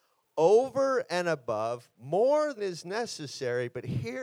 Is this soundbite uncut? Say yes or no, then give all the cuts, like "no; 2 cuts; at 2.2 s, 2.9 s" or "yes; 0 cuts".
no; 1 cut; at 2.6 s